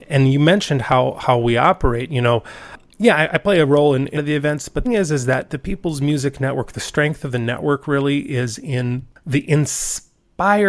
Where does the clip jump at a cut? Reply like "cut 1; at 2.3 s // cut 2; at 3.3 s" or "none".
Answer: cut 1; at 4.2 s // cut 2; at 4.8 s